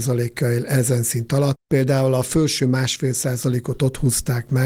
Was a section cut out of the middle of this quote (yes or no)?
yes